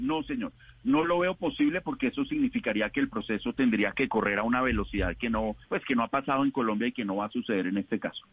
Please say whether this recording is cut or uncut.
cut